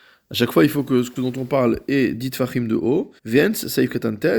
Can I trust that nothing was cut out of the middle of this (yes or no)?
no